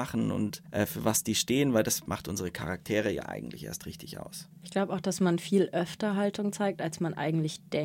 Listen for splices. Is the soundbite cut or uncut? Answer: uncut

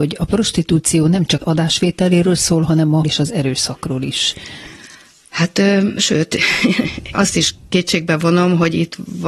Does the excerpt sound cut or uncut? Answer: cut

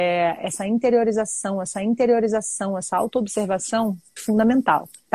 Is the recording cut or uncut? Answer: cut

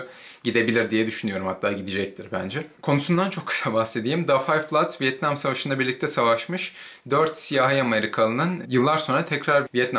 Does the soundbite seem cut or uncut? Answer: cut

